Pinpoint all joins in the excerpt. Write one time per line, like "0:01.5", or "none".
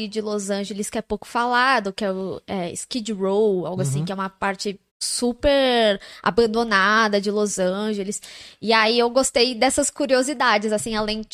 0:04.9